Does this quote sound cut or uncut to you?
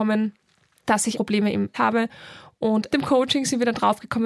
cut